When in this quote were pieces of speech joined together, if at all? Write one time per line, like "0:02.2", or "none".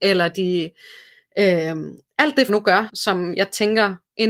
0:02.5
0:02.9